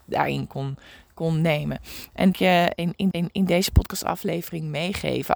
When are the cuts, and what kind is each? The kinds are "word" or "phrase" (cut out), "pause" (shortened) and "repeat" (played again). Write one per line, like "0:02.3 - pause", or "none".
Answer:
0:02.3 - phrase
0:03.1 - repeat